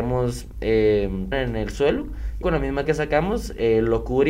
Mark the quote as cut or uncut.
cut